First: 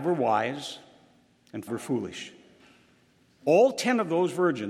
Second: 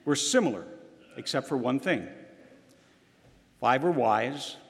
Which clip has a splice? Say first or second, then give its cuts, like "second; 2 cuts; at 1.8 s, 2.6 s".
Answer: first; 1 cut; at 1.7 s